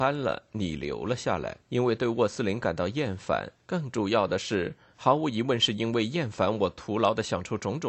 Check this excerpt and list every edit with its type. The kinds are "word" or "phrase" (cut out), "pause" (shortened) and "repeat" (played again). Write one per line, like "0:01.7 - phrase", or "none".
0:01.6 - pause
0:03.6 - pause